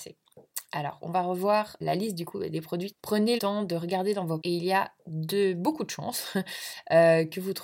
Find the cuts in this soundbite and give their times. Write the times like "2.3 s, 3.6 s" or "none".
1.8 s, 2.9 s, 3.4 s, 4.4 s